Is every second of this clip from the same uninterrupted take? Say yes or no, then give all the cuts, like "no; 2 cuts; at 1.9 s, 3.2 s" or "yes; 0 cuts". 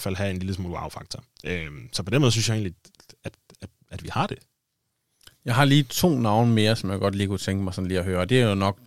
yes; 0 cuts